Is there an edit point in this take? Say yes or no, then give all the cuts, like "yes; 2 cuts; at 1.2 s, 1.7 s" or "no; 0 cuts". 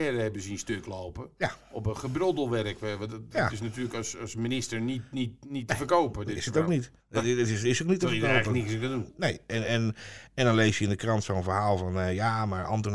yes; 1 cut; at 7.0 s